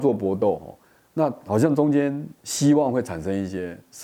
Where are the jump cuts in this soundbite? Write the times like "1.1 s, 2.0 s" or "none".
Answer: 2.4 s